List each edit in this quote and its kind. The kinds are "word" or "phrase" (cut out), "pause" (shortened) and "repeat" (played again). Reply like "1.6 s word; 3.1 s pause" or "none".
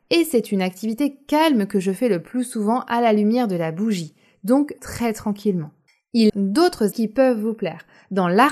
4.8 s word; 6.3 s word; 6.9 s word